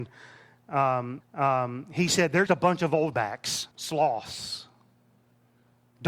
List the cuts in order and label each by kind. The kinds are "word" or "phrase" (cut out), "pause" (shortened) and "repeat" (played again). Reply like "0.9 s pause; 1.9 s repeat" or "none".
1.2 s repeat; 2.5 s word; 3.1 s word; 3.7 s pause